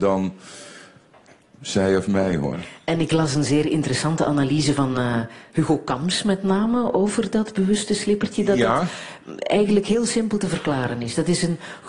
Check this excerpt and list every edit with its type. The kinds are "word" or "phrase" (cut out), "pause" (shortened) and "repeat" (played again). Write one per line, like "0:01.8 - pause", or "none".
none